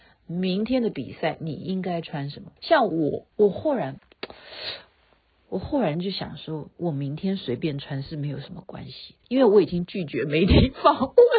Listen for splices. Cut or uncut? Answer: cut